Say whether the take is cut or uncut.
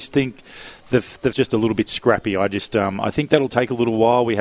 cut